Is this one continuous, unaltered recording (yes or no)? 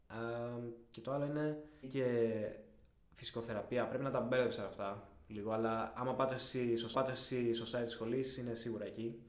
no